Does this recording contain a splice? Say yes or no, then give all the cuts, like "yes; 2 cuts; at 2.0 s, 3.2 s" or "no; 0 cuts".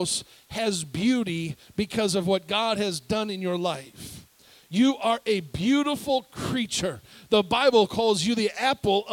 no; 0 cuts